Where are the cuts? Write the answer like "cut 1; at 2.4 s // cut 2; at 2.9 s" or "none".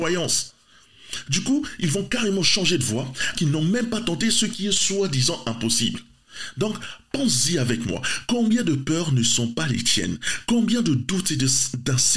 cut 1; at 3.3 s

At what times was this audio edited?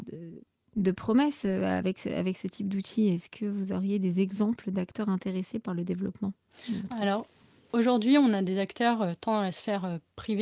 none

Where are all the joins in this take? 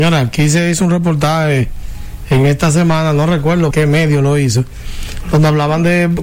cut 1; at 3.7 s

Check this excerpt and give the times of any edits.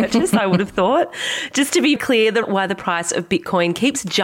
cut 1; at 2.0 s // cut 2; at 2.4 s

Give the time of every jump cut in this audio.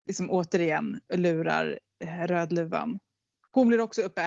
none

